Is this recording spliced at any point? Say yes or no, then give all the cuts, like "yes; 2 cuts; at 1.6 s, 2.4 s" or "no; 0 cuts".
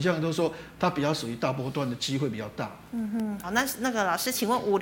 yes; 1 cut; at 3.4 s